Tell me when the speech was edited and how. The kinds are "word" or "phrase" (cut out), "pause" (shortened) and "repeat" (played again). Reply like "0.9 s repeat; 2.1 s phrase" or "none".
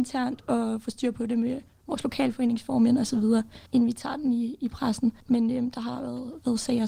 3.7 s pause; 5.2 s pause